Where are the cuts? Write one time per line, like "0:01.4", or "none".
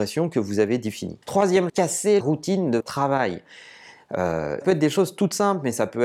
0:01.7
0:02.2
0:02.8
0:04.6

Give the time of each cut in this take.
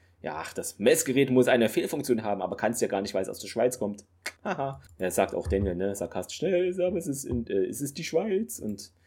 0:04.4

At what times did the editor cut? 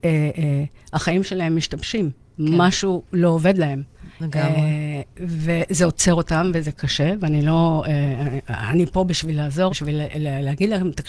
0:04.1
0:09.7

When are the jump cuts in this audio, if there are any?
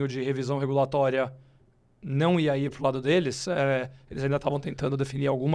none

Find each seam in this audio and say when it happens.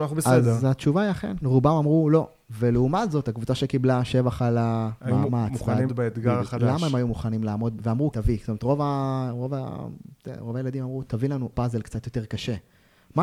0:01.4
0:05.0
0:05.9
0:08.1
0:11.5

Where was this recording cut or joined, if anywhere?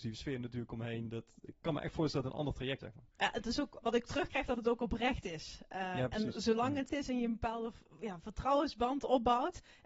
0:02.8
0:03.8
0:04.5
0:06.9

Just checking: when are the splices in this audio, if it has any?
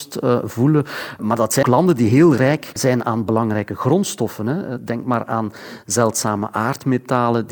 0:01.6

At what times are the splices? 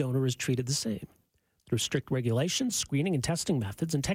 none

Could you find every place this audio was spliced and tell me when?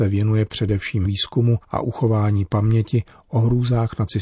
0:01.0
0:01.6

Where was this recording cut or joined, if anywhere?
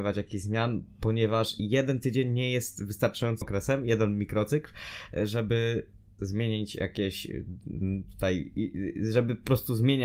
0:03.4
0:06.2

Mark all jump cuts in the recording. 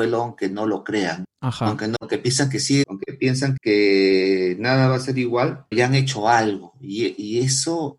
0:01.2
0:02.0
0:02.8
0:03.6
0:05.7

